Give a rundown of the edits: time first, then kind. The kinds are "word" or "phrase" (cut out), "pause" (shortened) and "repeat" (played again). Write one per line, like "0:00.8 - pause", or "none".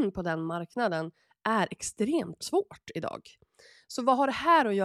none

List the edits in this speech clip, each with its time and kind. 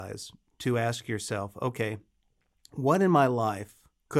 none

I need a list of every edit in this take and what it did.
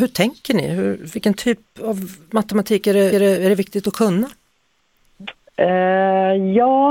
0:03.1 - repeat

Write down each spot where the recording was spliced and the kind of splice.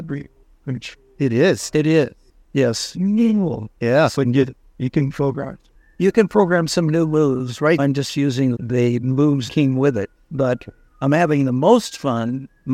0:07.8 - word
0:08.6 - word
0:09.5 - word

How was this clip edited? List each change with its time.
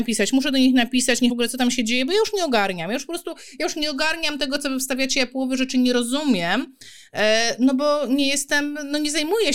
0:01.3 - word

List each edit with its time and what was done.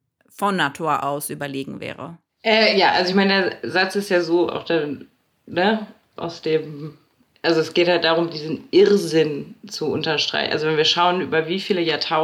none

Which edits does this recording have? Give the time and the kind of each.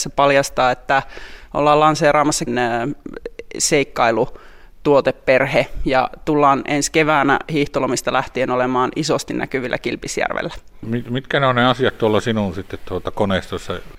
0:02.5 - phrase

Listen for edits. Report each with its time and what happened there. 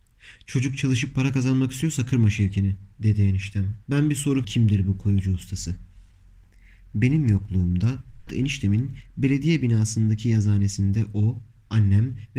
0:02.9 - pause
0:03.8 - pause
0:04.4 - word
0:08.3 - word

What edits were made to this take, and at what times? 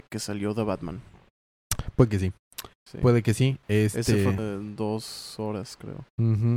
0:04.4 - word

